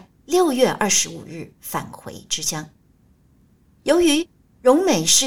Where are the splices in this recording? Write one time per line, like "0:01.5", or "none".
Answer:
0:01.6